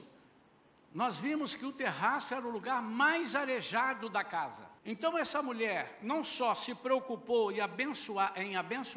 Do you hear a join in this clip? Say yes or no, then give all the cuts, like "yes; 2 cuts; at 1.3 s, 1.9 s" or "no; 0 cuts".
yes; 1 cut; at 4.8 s